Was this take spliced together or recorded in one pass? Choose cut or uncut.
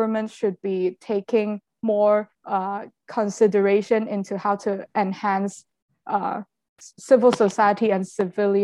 cut